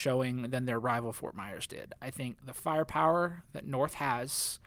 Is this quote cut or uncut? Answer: uncut